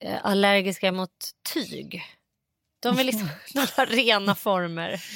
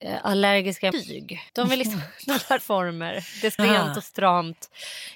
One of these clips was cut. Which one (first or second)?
second